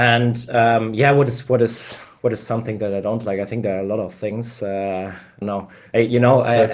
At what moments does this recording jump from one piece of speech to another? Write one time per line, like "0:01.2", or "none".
0:05.4